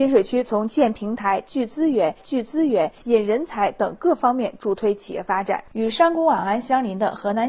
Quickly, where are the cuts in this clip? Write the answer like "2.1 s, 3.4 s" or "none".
2.2 s